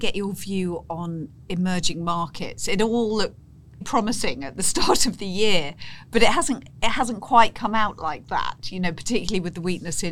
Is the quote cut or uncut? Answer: cut